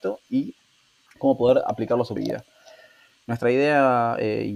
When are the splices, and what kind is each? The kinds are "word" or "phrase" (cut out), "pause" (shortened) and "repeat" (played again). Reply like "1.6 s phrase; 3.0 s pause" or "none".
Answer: 2.2 s word